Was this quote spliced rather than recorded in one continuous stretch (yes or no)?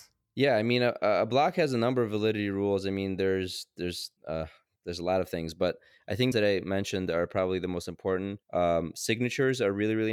yes